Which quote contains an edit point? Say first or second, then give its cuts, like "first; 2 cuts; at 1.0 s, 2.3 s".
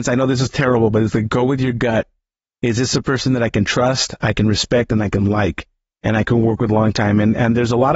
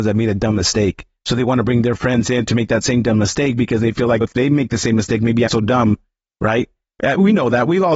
second; 2 cuts; at 4.2 s, 5.5 s